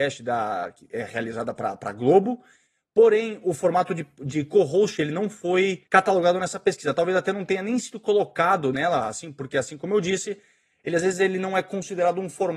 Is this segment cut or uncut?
cut